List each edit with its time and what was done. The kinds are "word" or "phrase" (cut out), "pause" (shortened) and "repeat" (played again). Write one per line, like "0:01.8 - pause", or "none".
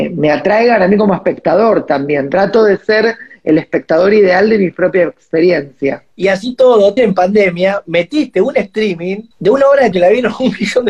0:07.0 - word
0:09.3 - pause
0:09.9 - word